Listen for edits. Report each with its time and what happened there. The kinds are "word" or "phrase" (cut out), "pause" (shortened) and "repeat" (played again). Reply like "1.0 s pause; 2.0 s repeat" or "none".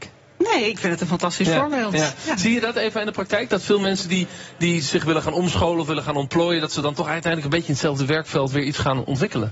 none